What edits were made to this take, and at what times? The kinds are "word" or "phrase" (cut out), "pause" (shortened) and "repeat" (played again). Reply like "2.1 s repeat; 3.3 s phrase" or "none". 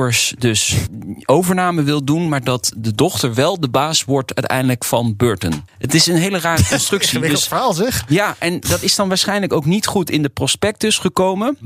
none